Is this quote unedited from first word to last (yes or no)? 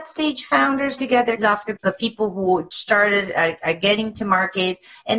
no